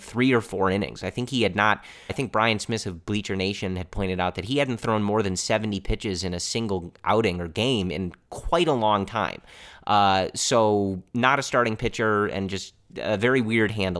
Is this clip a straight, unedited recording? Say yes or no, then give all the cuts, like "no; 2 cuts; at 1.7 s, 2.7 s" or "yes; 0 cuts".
no; 2 cuts; at 2.1 s, 11.1 s